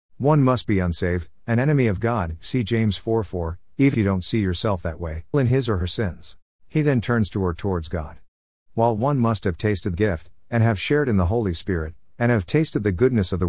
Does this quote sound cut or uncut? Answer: cut